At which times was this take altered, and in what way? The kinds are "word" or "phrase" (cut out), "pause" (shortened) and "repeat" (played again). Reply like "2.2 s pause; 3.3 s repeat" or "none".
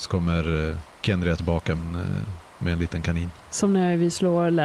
0.9 s pause; 1.8 s word